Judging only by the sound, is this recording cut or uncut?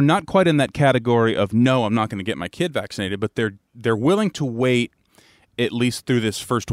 uncut